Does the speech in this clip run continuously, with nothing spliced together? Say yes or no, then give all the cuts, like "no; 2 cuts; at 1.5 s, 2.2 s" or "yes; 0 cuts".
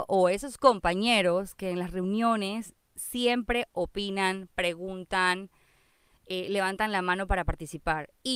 yes; 0 cuts